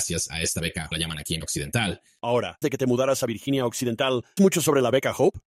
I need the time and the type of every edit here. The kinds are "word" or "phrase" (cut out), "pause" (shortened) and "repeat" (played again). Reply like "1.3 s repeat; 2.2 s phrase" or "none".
0.9 s phrase; 1.4 s word; 2.6 s word; 4.4 s word